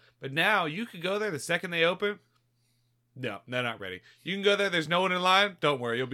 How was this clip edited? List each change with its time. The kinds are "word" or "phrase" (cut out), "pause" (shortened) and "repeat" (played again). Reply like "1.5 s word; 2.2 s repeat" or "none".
none